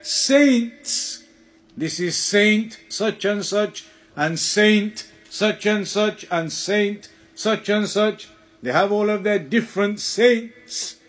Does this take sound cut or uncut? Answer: uncut